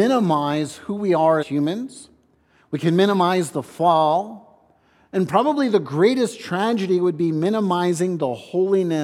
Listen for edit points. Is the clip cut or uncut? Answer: cut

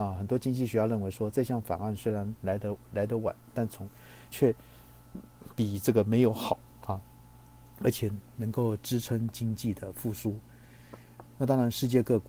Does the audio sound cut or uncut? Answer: cut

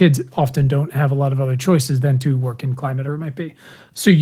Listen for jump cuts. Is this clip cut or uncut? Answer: cut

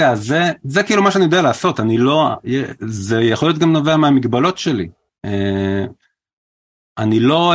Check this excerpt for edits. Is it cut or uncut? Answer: uncut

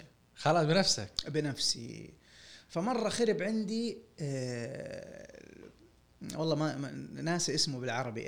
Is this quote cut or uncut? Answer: uncut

